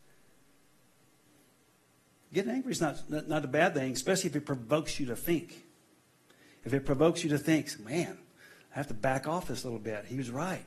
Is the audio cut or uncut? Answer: uncut